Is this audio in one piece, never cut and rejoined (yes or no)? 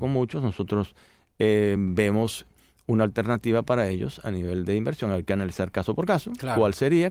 yes